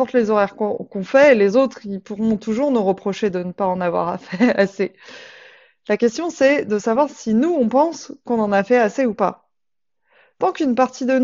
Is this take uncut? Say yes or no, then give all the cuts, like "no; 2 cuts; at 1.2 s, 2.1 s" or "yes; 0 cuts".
yes; 0 cuts